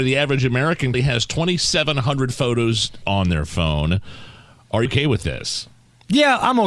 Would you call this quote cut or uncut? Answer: cut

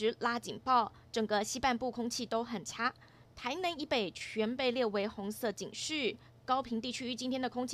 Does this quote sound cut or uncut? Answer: uncut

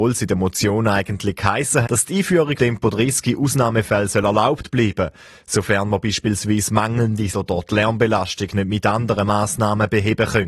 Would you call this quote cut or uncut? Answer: cut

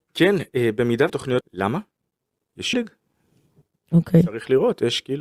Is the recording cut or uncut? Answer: cut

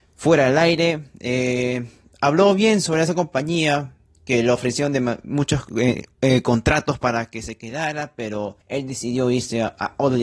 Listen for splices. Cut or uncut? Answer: cut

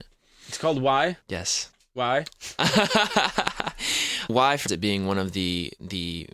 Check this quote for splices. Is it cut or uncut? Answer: cut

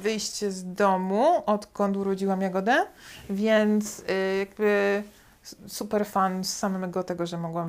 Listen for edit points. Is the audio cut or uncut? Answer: uncut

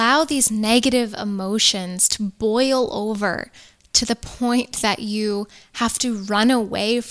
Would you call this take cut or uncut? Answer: uncut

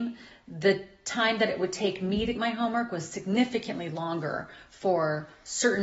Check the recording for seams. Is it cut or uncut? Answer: cut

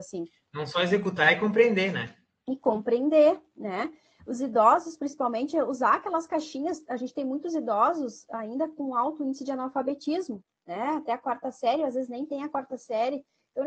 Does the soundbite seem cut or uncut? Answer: uncut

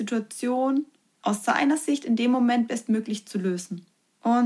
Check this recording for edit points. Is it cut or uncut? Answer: uncut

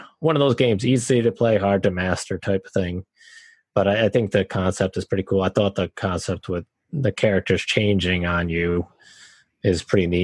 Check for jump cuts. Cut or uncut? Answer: uncut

